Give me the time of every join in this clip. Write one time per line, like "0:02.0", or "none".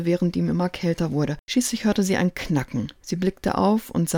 0:01.4